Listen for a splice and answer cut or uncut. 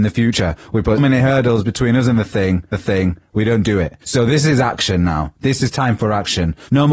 cut